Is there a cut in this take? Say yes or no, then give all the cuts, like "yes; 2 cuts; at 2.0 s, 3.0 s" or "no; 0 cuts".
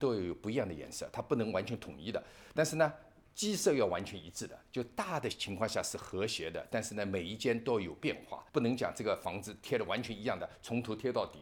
yes; 1 cut; at 8.5 s